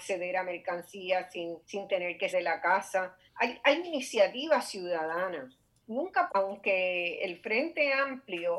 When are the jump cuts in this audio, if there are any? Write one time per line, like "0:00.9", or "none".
0:01.6
0:02.3
0:03.3
0:03.8
0:06.3